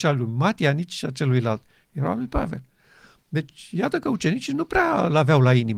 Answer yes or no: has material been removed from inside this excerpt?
no